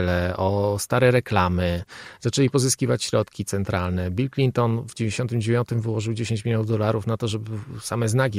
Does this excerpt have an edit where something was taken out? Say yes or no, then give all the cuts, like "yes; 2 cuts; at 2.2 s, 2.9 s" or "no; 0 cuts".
no; 0 cuts